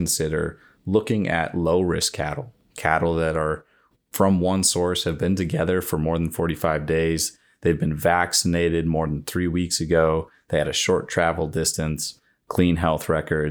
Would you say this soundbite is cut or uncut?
uncut